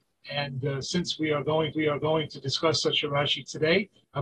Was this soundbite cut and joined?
yes; 1 cut; at 1.7 s

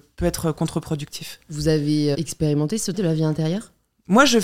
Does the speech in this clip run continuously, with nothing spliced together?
no; 2 cuts; at 2.1 s, 2.9 s

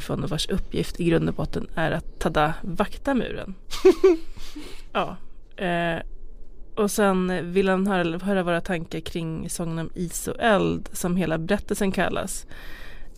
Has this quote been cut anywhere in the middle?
no; 0 cuts

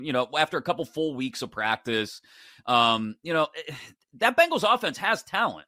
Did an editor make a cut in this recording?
no; 0 cuts

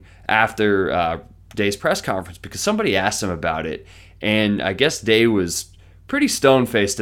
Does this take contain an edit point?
no; 0 cuts

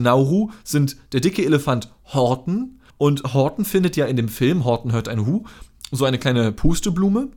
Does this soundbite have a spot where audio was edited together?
yes; 1 cut; at 2.9 s

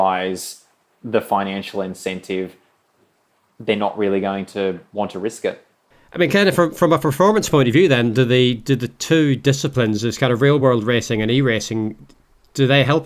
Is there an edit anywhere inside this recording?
no; 0 cuts

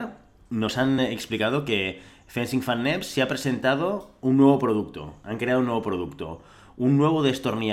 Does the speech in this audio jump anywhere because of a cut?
no; 0 cuts

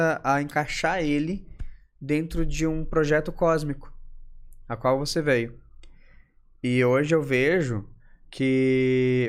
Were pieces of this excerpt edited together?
no; 0 cuts

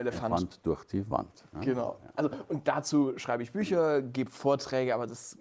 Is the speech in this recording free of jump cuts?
yes; 0 cuts

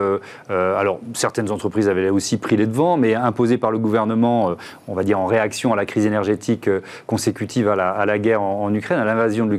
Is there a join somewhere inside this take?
no; 0 cuts

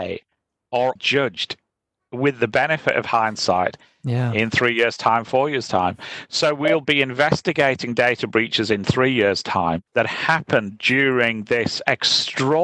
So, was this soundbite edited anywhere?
yes; 2 cuts; at 1.0 s, 9.9 s

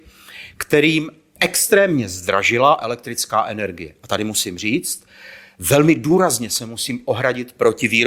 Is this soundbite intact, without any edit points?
yes; 0 cuts

